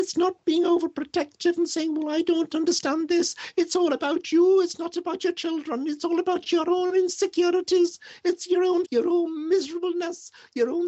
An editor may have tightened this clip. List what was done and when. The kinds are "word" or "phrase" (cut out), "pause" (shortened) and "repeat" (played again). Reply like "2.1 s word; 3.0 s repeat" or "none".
8.9 s word

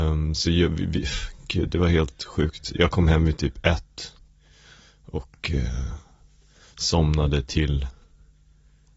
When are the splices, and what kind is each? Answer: none

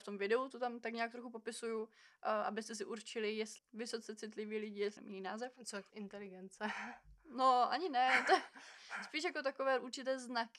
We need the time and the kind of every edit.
3.6 s phrase; 5.0 s phrase; 5.9 s word

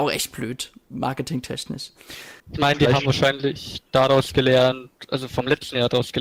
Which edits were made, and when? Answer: 2.4 s pause

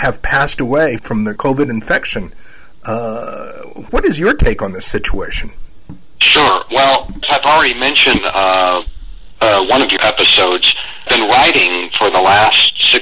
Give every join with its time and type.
1.0 s word; 1.4 s word; 3.9 s word; 7.2 s word; 8.2 s word; 10.0 s word; 11.1 s word

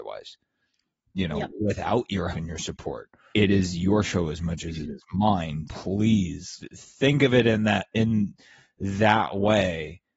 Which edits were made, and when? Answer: 2.3 s word; 3.3 s word; 5.7 s word; 6.6 s word

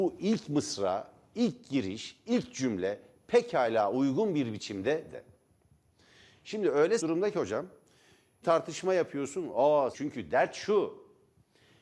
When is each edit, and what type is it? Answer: 5.1 s word; 7.0 s word; 8.4 s word; 9.9 s word

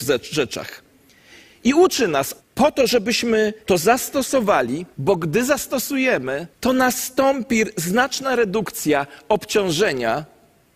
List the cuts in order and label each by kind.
2.4 s pause; 3.6 s pause; 4.9 s pause; 6.5 s pause

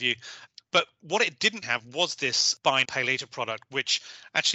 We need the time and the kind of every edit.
1.6 s word; 2.8 s word

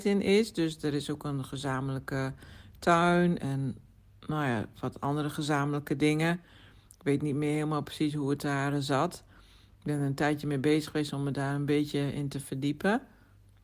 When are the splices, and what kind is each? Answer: 3.4 s word

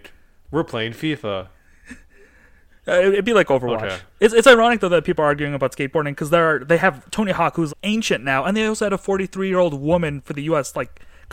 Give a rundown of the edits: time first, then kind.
4.1 s pause; 7.7 s word

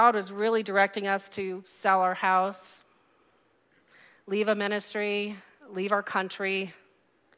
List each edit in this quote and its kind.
none

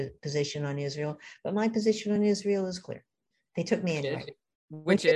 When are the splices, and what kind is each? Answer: none

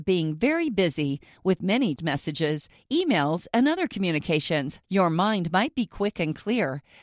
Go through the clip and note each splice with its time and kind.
2.0 s word; 4.8 s pause

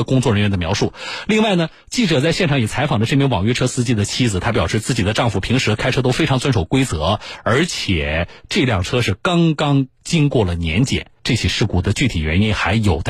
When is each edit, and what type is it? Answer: 11.2 s pause

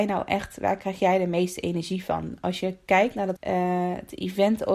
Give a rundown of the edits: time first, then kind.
3.4 s word

